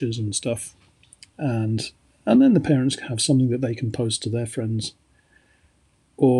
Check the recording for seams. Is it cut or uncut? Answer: uncut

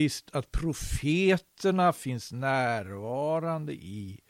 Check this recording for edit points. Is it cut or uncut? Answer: uncut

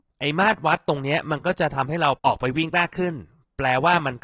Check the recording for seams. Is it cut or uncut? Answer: cut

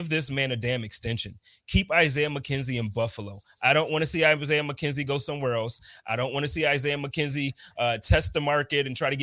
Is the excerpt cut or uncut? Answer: uncut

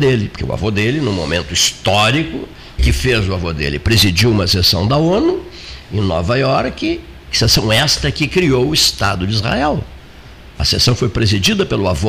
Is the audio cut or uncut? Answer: cut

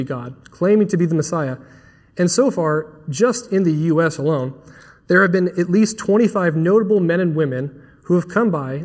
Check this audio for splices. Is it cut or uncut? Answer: uncut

